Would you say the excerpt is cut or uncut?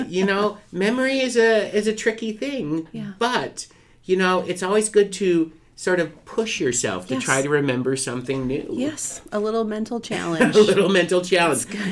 uncut